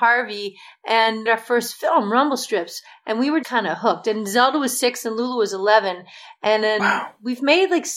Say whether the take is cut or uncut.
cut